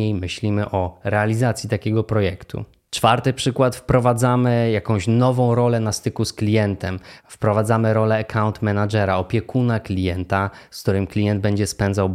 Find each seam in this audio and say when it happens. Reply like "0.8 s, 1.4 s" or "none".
none